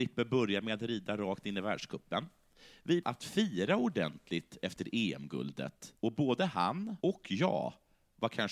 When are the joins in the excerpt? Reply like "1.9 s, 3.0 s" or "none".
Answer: 3.0 s, 6.0 s, 7.0 s